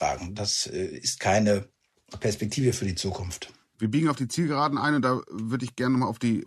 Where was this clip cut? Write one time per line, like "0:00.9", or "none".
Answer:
none